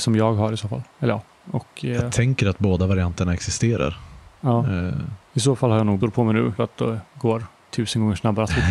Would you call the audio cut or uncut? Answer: cut